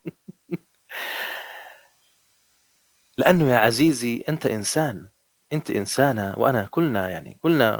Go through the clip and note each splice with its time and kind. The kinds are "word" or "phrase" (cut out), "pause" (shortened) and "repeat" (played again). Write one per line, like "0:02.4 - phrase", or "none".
0:05.3 - pause

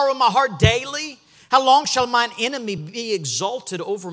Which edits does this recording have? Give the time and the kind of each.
none

